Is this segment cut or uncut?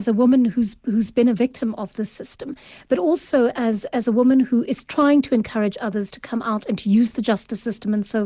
uncut